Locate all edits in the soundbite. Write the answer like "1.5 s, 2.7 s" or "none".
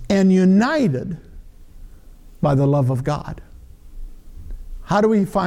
none